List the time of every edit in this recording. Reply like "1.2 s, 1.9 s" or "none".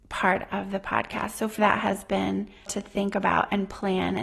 1.6 s, 2.7 s